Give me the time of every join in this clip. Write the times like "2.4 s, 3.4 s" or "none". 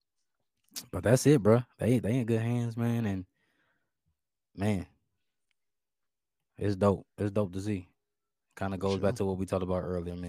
none